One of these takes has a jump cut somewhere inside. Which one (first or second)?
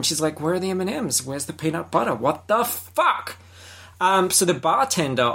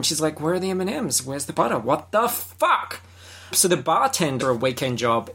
second